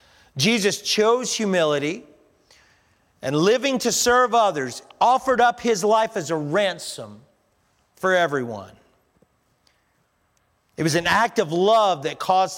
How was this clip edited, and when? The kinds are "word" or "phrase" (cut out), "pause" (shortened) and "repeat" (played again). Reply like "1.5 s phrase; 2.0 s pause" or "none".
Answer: none